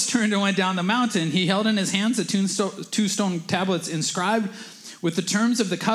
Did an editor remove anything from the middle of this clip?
no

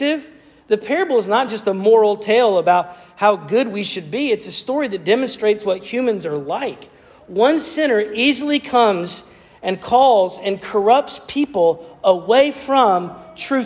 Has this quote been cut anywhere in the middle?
no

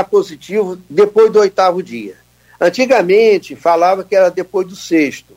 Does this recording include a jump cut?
no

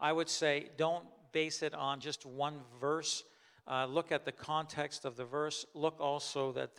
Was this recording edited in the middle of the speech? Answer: no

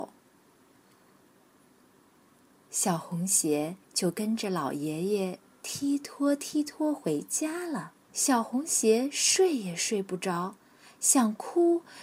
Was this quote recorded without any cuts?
no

